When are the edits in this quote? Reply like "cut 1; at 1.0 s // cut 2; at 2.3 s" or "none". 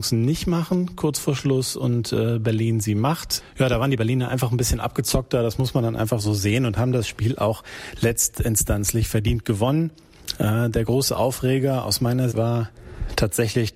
cut 1; at 12.3 s